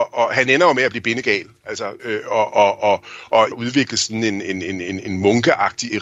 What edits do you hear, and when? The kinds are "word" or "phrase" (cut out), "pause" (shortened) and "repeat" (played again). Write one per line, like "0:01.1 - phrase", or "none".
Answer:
0:02.0 - word
0:03.5 - phrase